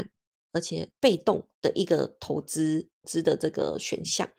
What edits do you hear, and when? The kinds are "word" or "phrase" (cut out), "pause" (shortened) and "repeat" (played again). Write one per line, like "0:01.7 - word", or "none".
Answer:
0:01.0 - pause
0:01.5 - pause

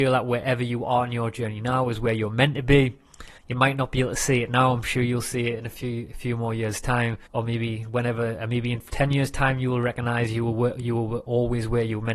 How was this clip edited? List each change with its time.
0:03.4 - pause
0:07.3 - pause

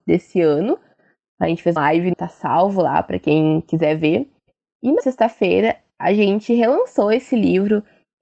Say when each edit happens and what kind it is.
0:01.8 - word
0:02.1 - word
0:05.0 - word

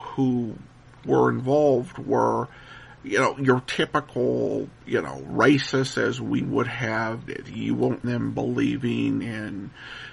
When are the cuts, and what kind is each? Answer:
0:01.0 - word
0:04.8 - pause
0:07.3 - word
0:08.0 - word

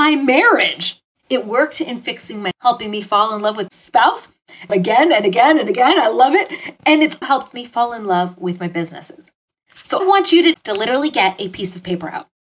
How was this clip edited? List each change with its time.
0:02.5 - word
0:03.7 - word
0:04.7 - word
0:07.2 - word
0:10.0 - word
0:10.5 - word

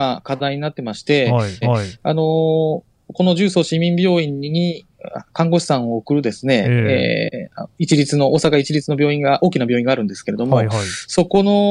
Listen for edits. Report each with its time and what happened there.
0:01.6 - repeat
0:07.7 - pause

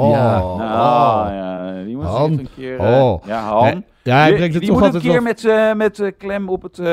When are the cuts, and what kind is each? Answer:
none

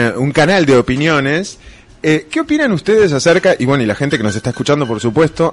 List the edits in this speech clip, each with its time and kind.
none

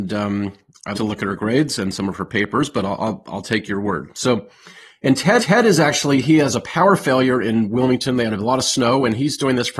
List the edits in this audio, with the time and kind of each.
0:00.9 - word
0:05.4 - repeat

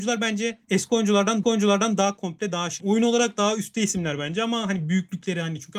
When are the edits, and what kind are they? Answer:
0:01.4 - repeat
0:02.8 - word

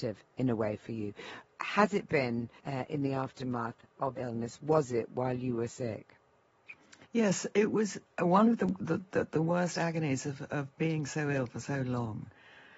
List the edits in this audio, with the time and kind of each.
0:02.6 - pause
0:04.2 - word
0:07.0 - pause

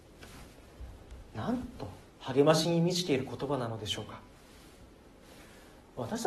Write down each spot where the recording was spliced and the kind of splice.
0:02.1 - pause

